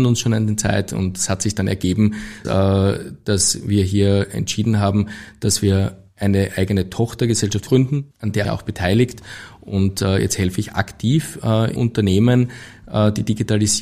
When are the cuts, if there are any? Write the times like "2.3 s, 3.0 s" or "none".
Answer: 2.4 s, 6.1 s, 7.7 s, 8.1 s, 8.4 s, 11.8 s

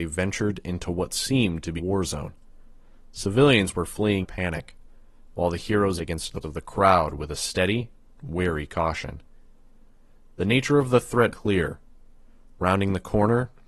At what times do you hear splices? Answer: 1.8 s, 4.2 s, 6.0 s, 6.4 s, 11.3 s

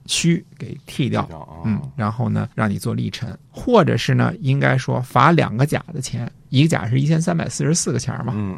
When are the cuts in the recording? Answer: 2.5 s, 3.5 s

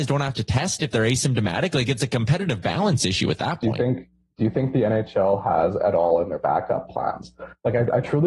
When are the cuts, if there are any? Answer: none

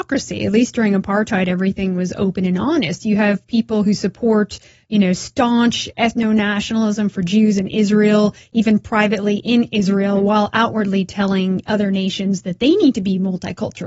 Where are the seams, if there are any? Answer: none

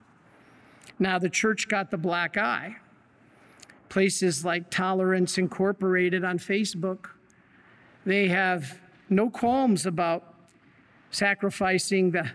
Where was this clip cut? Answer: none

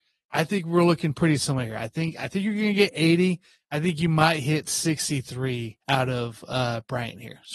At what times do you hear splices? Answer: 5.8 s

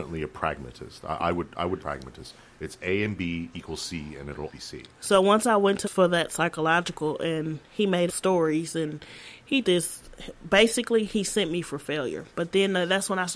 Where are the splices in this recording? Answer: 1.8 s, 4.5 s, 5.8 s, 8.1 s, 9.6 s

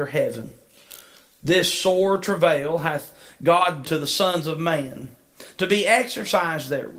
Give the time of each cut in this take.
3.8 s

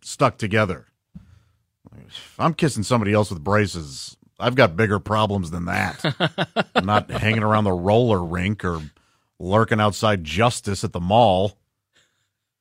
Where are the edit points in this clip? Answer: none

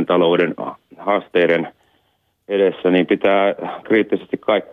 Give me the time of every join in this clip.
3.8 s

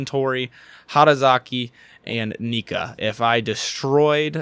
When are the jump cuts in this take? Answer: none

